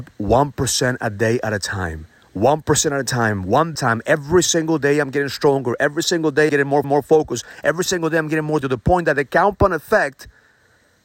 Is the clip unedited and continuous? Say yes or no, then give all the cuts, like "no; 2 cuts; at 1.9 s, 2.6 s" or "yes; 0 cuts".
no; 5 cuts; at 2.2 s, 3.7 s, 6.5 s, 6.8 s, 8.6 s